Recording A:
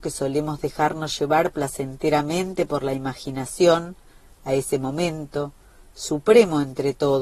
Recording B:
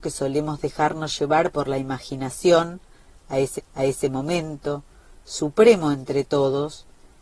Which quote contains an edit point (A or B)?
B